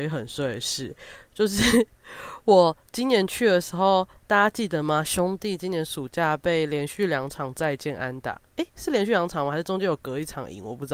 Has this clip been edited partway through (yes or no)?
no